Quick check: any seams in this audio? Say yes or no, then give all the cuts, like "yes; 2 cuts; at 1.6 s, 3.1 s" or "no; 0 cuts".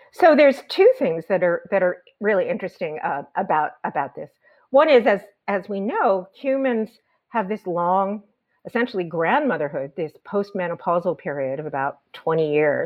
no; 0 cuts